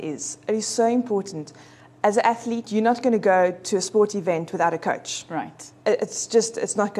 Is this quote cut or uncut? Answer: uncut